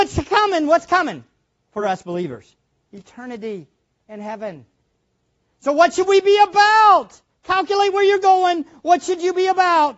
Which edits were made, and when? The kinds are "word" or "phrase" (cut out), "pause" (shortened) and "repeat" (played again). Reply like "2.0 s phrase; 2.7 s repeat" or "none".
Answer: none